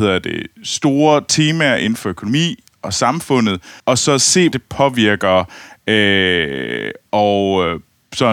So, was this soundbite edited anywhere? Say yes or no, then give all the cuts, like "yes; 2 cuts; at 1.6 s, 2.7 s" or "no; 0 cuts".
yes; 3 cuts; at 3.8 s, 4.5 s, 7.1 s